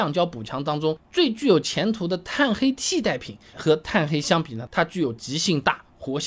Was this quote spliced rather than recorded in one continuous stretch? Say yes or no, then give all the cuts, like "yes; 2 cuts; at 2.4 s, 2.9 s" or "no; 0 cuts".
yes; 1 cut; at 3.5 s